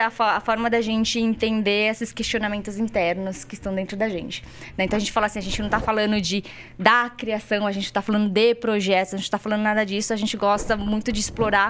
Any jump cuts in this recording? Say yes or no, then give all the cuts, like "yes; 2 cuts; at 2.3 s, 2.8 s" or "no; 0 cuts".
no; 0 cuts